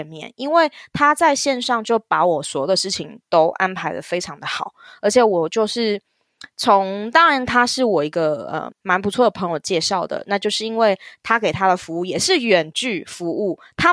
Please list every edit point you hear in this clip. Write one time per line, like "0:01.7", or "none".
0:08.7